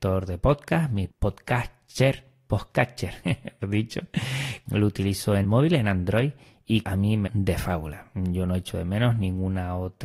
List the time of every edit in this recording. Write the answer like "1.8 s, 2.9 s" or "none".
1.1 s, 3.6 s, 4.7 s, 5.4 s, 6.8 s, 7.3 s